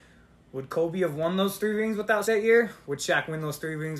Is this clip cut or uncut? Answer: cut